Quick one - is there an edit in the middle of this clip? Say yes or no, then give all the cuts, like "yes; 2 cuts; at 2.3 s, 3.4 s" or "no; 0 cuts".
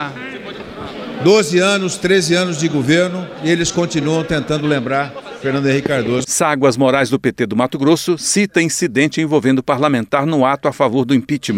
no; 0 cuts